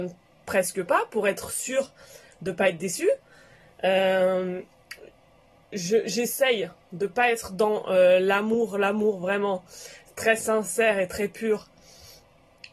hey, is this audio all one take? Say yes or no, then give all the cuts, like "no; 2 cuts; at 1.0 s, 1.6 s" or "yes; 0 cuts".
yes; 0 cuts